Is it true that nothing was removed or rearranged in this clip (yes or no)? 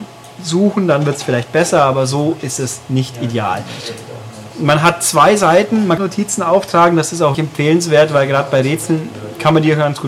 no